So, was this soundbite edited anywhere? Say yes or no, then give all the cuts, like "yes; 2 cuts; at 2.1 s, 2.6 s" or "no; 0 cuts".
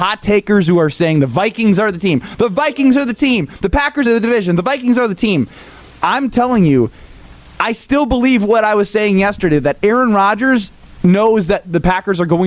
yes; 1 cut; at 4.0 s